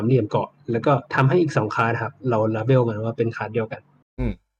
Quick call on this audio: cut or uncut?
cut